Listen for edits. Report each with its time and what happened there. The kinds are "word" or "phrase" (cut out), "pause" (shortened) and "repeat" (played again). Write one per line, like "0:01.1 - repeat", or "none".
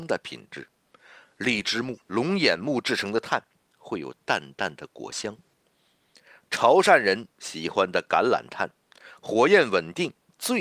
0:02.0 - pause
0:07.3 - pause

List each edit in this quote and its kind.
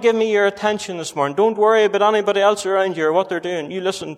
none

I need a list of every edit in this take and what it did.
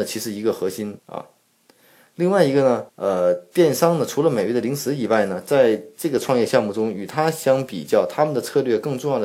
0:01.0 - pause
0:02.9 - pause

